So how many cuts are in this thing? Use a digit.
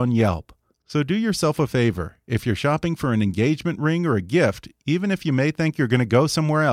0